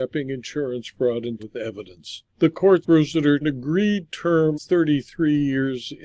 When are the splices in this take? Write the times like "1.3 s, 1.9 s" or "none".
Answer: 1.4 s, 2.3 s, 2.8 s, 3.4 s, 4.5 s